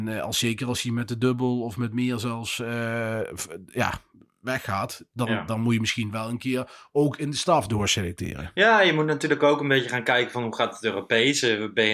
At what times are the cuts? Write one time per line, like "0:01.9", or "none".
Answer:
none